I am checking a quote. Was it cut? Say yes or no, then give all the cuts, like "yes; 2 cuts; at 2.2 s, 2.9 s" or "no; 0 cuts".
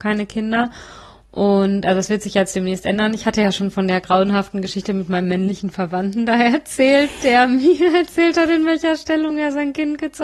no; 0 cuts